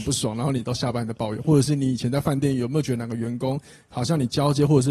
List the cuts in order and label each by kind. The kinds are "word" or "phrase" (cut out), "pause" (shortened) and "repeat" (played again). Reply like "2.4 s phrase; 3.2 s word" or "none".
none